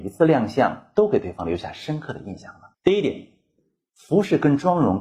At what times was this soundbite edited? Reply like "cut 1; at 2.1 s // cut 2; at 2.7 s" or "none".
cut 1; at 2.7 s